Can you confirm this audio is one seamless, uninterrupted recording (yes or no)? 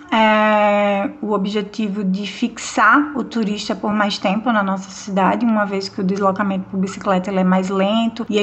yes